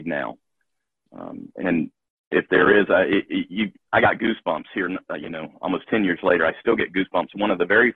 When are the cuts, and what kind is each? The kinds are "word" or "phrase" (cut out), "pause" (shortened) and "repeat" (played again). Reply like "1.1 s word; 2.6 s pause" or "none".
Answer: none